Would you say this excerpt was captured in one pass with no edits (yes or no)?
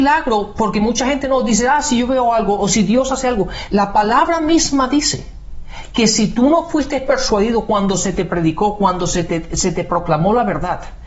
yes